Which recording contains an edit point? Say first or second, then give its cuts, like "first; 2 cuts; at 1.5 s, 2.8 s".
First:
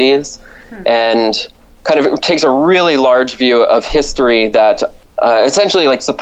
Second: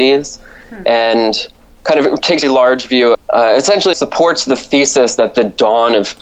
second; 3 cuts; at 2.4 s, 3.1 s, 3.9 s